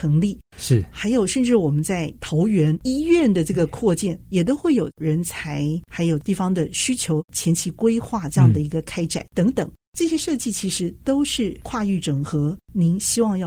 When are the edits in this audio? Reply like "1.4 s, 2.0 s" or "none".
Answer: none